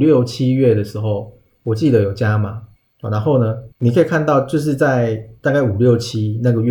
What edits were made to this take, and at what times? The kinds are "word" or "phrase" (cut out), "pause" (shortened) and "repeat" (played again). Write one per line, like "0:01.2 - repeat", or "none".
0:02.8 - pause
0:03.7 - pause